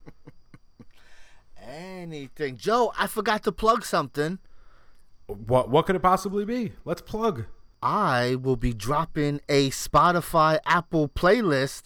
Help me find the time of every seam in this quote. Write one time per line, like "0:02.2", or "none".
none